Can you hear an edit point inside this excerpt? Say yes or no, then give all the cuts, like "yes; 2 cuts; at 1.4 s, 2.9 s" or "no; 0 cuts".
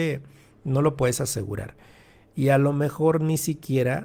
no; 0 cuts